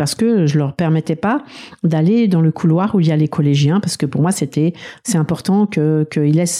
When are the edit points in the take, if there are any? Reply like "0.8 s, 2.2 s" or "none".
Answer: none